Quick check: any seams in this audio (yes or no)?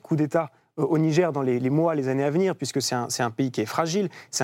no